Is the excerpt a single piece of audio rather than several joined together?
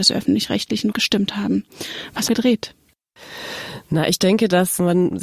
no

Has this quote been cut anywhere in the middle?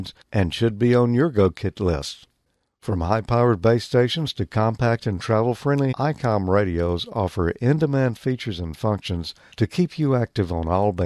yes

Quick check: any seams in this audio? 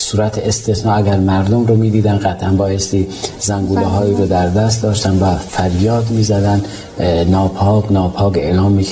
no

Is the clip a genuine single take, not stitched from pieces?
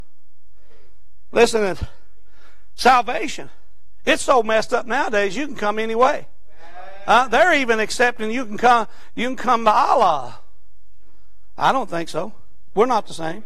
yes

